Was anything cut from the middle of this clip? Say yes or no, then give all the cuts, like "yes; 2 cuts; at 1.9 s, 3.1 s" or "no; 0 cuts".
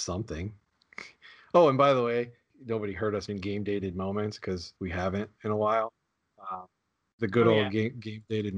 yes; 2 cuts; at 3.3 s, 4.8 s